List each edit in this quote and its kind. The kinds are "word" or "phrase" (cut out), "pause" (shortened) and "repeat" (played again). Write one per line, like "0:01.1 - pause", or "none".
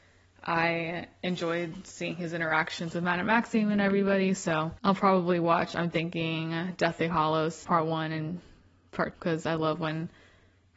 0:04.8 - pause
0:07.6 - word
0:09.1 - word